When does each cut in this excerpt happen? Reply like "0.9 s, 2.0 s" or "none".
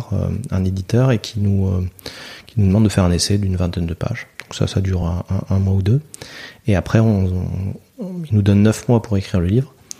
none

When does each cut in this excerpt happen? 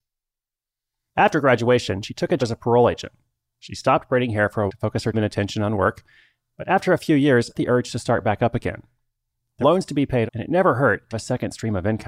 2.4 s, 4.7 s, 5.1 s, 7.5 s, 9.6 s, 10.3 s, 11.1 s

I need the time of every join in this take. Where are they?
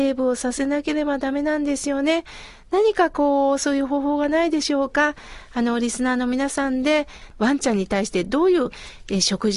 7.3 s

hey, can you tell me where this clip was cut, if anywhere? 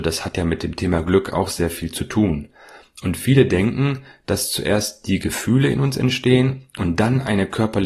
none

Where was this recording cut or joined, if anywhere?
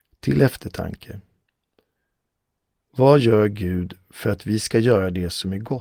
none

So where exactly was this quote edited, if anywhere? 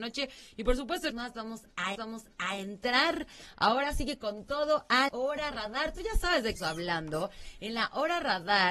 1.1 s, 1.9 s, 5.1 s, 6.6 s

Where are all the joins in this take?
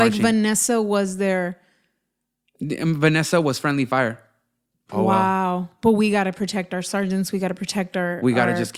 none

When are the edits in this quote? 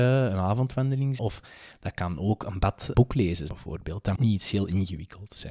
1.2 s, 2.9 s, 3.5 s, 4.2 s

